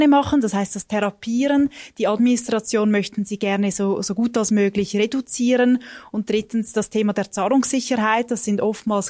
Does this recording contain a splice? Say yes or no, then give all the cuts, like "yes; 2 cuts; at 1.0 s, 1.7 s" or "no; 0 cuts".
no; 0 cuts